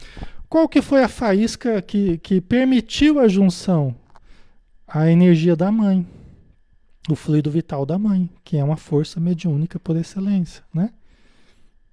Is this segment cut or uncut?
uncut